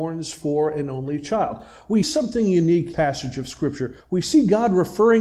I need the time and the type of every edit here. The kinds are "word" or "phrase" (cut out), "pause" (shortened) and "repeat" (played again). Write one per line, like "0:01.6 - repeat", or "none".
0:02.0 - word
0:02.9 - phrase
0:04.0 - pause